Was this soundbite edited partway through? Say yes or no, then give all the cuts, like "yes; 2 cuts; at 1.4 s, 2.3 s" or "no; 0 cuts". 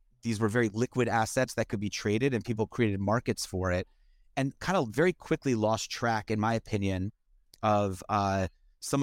no; 0 cuts